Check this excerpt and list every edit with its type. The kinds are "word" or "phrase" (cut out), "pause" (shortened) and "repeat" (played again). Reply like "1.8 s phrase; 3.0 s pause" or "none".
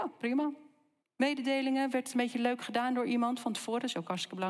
1.0 s pause

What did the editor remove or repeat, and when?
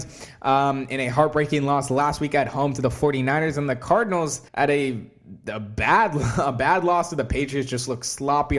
4.5 s pause

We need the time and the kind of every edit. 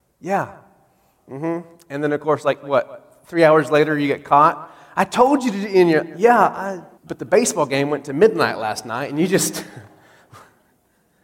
7.0 s pause

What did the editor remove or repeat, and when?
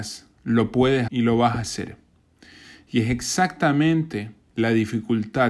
1.1 s word

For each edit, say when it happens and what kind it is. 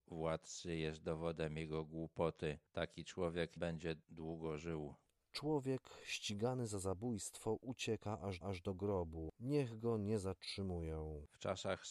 3.6 s word; 8.4 s repeat

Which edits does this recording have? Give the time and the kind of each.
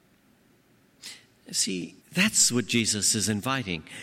2.0 s pause

